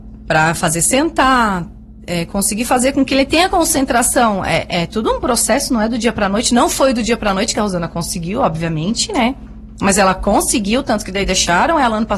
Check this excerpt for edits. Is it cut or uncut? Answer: uncut